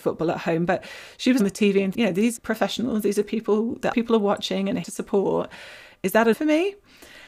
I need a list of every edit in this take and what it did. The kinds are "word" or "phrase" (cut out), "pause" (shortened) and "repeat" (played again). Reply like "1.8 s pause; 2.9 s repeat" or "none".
1.4 s word; 1.9 s word; 2.4 s word; 3.9 s word; 4.8 s word; 6.3 s word